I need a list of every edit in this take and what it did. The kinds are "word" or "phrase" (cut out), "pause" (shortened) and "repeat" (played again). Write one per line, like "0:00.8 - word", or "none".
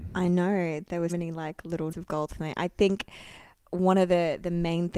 0:01.1 - word
0:01.9 - word